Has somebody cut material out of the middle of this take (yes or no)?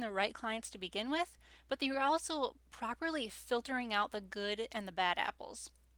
no